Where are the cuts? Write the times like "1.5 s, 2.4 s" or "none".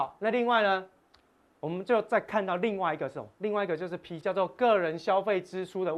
4.2 s

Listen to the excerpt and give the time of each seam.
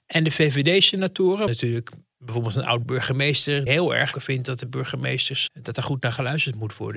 1.5 s, 3.7 s, 4.1 s, 5.5 s

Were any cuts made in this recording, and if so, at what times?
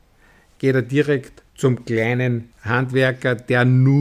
1.5 s, 2.5 s

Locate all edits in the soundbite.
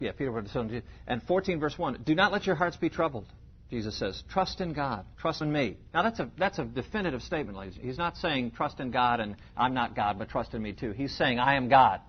5.4 s

